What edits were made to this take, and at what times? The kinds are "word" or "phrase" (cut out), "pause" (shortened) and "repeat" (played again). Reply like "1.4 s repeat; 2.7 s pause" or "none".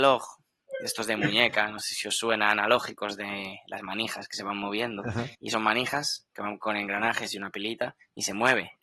5.3 s pause